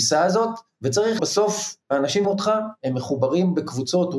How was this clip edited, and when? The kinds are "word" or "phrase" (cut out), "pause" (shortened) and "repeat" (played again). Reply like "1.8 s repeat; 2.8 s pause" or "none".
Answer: 1.2 s word; 2.2 s word